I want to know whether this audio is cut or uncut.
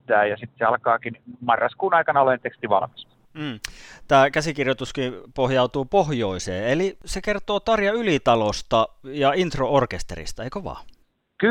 uncut